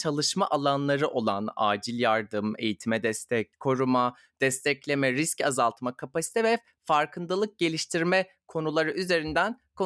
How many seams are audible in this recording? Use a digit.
0